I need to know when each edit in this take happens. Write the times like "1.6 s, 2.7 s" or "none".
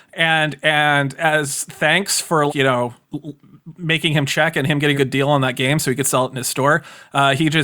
2.5 s, 3.0 s, 4.9 s